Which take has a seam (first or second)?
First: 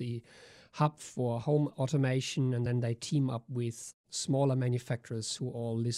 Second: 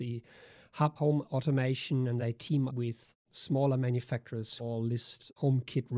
second